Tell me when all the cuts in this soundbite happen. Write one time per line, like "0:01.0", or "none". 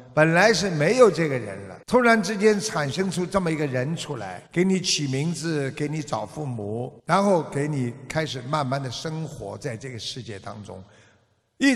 0:01.8
0:04.5
0:07.0